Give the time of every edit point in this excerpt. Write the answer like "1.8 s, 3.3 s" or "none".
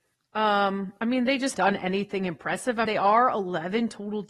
1.5 s, 2.9 s